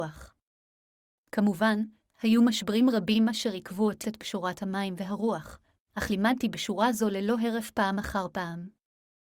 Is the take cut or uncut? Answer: cut